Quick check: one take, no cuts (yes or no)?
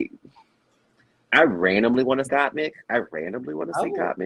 no